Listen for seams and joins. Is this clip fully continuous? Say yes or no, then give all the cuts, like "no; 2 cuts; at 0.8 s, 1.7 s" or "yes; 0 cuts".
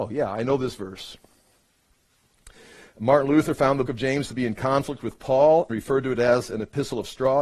no; 2 cuts; at 3.9 s, 5.7 s